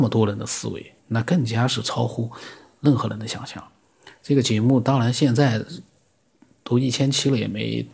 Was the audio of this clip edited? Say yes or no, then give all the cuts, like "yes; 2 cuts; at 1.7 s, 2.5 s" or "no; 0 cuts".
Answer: yes; 1 cut; at 1.0 s